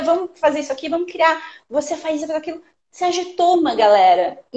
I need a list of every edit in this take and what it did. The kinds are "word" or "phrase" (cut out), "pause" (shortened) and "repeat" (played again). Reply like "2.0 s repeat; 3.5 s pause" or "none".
2.2 s word